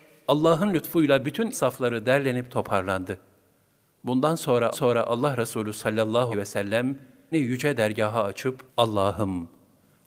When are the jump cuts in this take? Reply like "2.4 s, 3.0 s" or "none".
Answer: 1.5 s, 4.7 s, 6.3 s, 7.3 s, 8.7 s